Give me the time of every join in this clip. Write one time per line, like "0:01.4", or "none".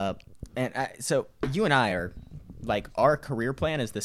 none